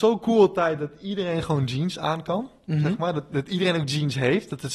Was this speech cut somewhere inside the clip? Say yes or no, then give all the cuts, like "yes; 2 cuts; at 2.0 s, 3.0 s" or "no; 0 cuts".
no; 0 cuts